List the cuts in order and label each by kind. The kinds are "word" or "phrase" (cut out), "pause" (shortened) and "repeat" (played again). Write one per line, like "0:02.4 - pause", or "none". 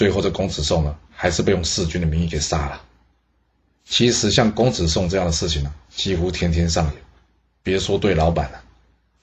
none

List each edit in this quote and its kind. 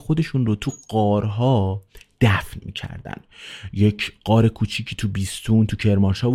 none

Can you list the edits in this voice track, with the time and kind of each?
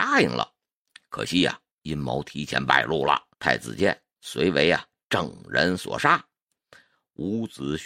0:01.7 - pause
0:03.3 - pause

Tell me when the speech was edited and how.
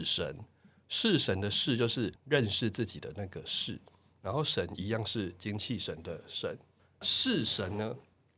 0:02.2 - pause

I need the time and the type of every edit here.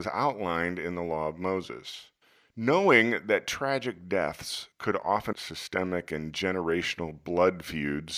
0:02.2 - pause
0:04.7 - pause
0:05.3 - phrase

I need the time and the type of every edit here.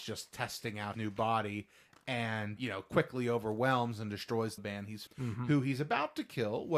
0:00.9 - word
0:02.6 - word
0:04.6 - phrase
0:05.1 - word

